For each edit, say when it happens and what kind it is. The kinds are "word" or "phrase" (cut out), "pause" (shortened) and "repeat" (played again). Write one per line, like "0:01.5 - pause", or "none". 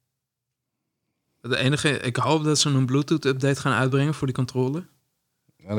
none